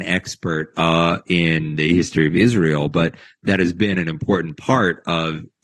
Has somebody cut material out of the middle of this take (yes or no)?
no